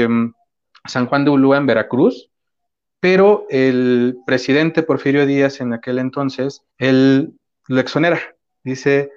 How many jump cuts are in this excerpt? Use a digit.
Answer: 1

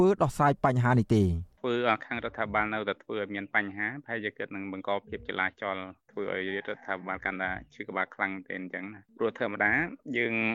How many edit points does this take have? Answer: 1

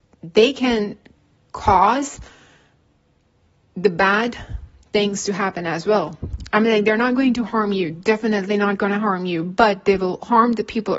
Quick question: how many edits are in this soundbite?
0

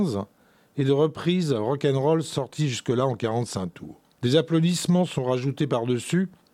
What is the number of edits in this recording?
1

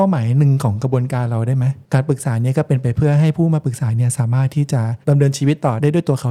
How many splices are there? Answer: 1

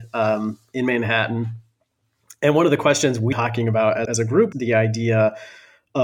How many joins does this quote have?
3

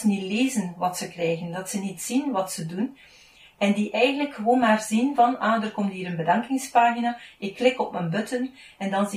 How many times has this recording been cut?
0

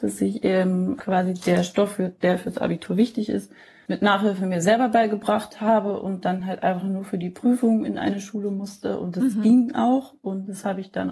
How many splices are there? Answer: 0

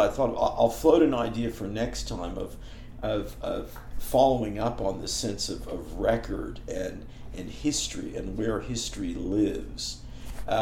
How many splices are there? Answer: 0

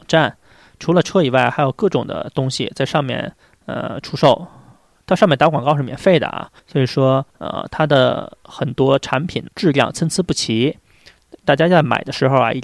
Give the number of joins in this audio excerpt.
3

